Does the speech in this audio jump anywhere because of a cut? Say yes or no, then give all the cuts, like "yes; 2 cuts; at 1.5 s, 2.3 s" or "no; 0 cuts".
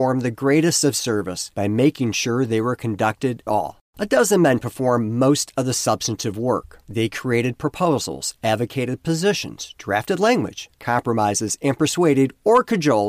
yes; 4 cuts; at 1.5 s, 3.5 s, 3.9 s, 10.7 s